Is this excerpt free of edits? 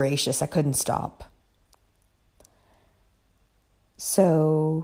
yes; 0 cuts

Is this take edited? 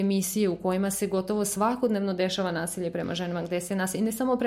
no; 0 cuts

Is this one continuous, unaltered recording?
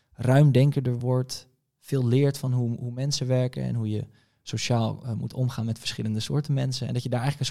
yes; 0 cuts

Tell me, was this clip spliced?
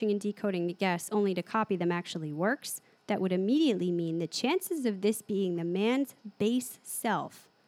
no; 0 cuts

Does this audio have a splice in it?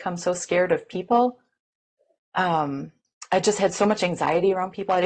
no; 0 cuts

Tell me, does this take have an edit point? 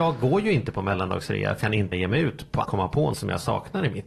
yes; 4 cuts; at 1.6 s, 1.9 s, 2.6 s, 3.1 s

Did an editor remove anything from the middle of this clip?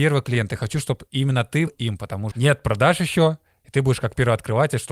yes; 2 cuts; at 1.7 s, 2.3 s

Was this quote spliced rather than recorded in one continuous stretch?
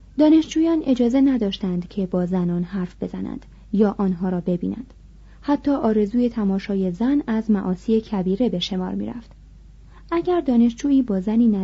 no; 0 cuts

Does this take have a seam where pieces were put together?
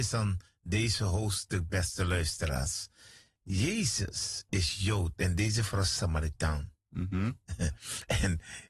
no; 0 cuts

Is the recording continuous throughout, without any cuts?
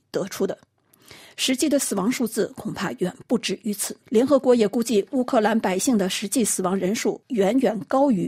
no; 1 cut; at 4.0 s

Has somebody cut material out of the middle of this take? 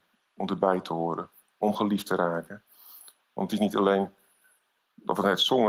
no; 0 cuts

